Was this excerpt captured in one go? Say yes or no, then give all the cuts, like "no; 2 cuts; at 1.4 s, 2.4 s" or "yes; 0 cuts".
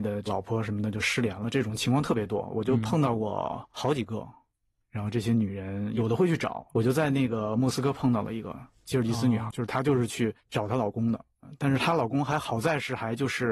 no; 1 cut; at 9.5 s